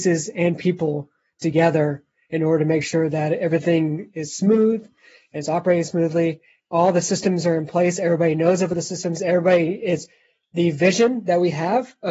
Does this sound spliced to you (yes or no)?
no